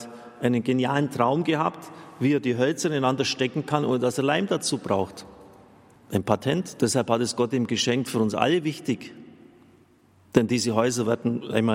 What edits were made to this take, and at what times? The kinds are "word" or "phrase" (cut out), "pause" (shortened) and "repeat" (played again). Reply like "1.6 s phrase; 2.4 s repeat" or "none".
none